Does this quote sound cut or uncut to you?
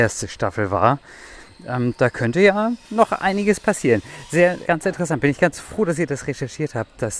cut